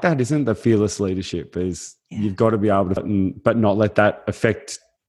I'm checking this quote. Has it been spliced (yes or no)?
yes